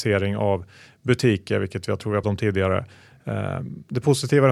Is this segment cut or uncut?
cut